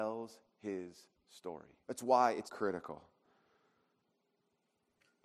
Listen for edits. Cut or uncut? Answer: cut